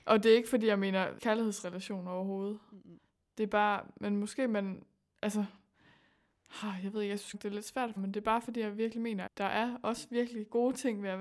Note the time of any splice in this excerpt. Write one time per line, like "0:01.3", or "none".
0:01.2
0:07.3
0:08.0
0:09.3